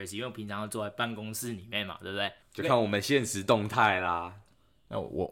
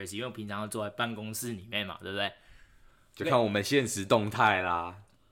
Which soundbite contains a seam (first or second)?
first